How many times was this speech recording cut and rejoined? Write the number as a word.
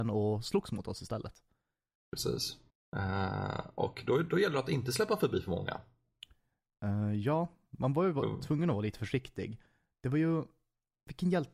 one